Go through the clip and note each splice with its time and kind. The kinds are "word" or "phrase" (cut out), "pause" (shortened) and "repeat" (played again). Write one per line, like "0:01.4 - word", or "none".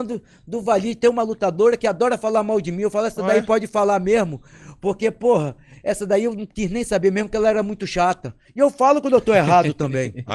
none